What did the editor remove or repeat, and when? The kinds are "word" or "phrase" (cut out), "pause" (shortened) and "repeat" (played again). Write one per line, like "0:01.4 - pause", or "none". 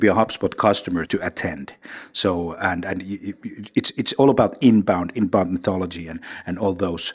0:01.1 - word

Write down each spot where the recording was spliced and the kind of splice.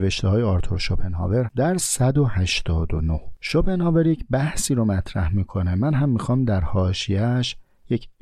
0:01.5 - word
0:01.8 - word

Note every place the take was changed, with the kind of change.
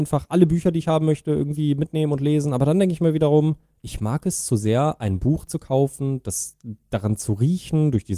0:03.7 - pause

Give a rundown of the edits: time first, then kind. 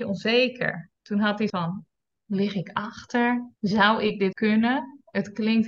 0:01.0 - pause
0:01.5 - word
0:02.2 - word
0:03.6 - pause
0:04.3 - word

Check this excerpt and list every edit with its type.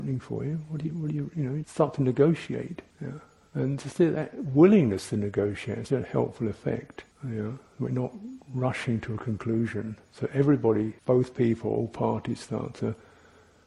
0:01.6 - word
0:02.9 - pause
0:05.9 - word
0:07.1 - pause
0:11.0 - pause

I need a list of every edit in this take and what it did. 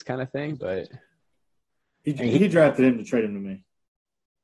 none

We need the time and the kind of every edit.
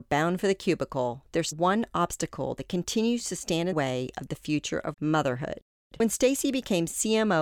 0:01.5 - word
0:03.7 - word
0:04.9 - word

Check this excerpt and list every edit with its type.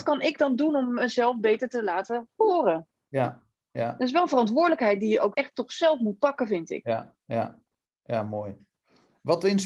0:05.3 - word

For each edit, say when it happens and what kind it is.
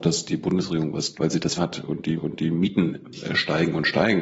0:01.1 - word
0:01.6 - word
0:02.2 - repeat

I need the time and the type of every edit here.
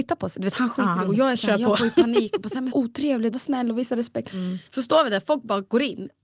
0:02.7 - phrase
0:03.3 - phrase
0:04.7 - pause

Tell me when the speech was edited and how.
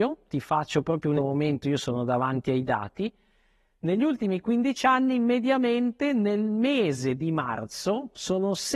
0:01.2 - phrase

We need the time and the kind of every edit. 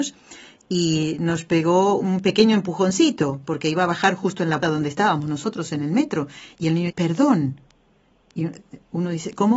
0:02.0 - word
0:04.6 - word
0:06.9 - word

